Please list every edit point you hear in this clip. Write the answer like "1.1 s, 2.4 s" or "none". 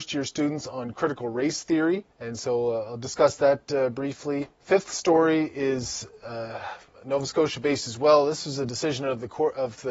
2.1 s, 4.5 s

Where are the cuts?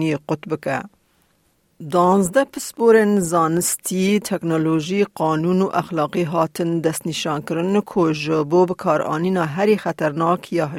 none

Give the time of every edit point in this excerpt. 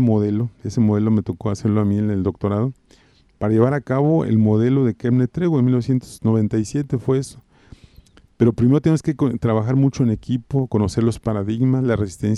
none

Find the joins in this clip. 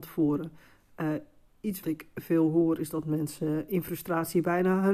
1.8 s

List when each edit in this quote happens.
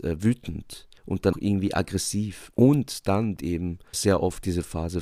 1.0 s, 1.3 s, 3.4 s, 3.9 s

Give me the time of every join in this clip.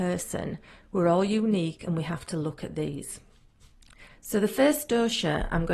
none

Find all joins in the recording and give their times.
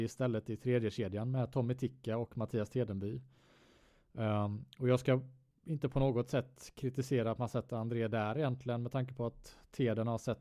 none

